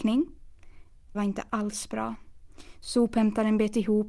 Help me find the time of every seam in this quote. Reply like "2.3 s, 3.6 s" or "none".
1.1 s

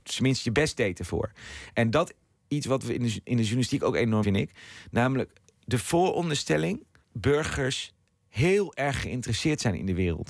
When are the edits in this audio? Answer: 2.4 s, 3.2 s, 4.2 s, 7.0 s

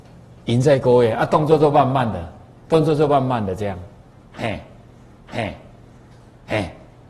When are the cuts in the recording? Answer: 5.1 s

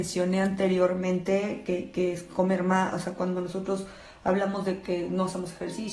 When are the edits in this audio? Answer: none

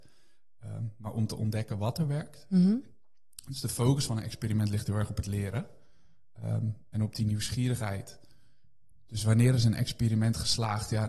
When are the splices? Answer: none

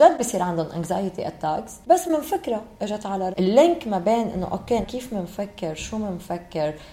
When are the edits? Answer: 1.8 s, 3.3 s, 4.8 s

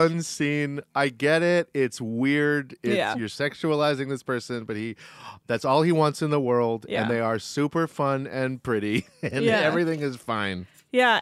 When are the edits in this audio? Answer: none

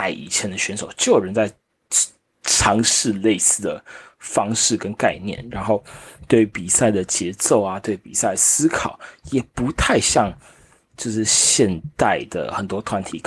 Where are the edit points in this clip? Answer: none

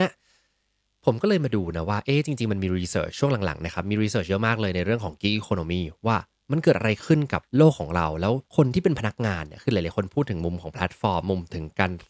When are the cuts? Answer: 7.5 s, 8.5 s

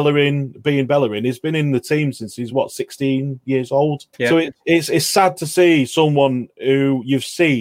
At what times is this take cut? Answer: 4.1 s

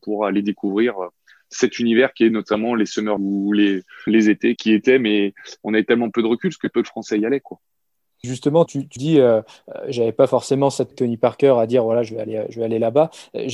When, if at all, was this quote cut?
3.2 s, 4.1 s, 4.6 s, 6.7 s, 8.2 s, 8.7 s, 9.0 s, 10.9 s

